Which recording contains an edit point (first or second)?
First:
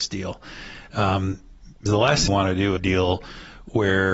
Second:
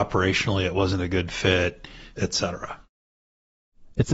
first